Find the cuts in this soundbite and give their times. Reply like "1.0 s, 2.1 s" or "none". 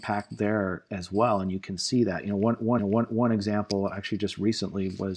2.8 s

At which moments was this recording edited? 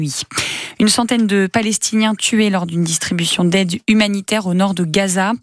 none

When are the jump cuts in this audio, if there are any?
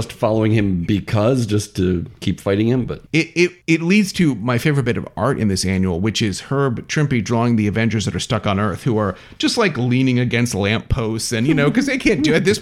3.1 s, 3.6 s

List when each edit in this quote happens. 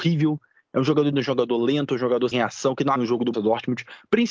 1.1 s, 2.3 s, 3.0 s, 3.3 s

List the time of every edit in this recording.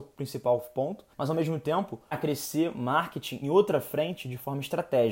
1.1 s, 2.1 s, 3.4 s

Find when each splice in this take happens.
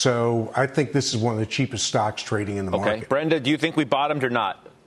none

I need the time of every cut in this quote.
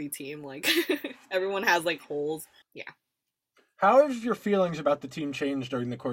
2.6 s

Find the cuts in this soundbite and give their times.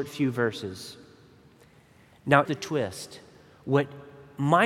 2.4 s

